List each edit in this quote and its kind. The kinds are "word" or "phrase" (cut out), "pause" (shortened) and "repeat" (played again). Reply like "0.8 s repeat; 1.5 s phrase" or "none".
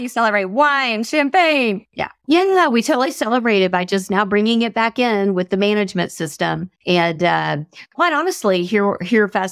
6.8 s pause